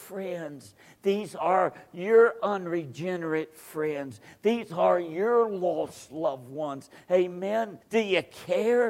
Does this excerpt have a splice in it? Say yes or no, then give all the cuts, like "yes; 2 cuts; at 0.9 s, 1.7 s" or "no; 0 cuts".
yes; 1 cut; at 7.8 s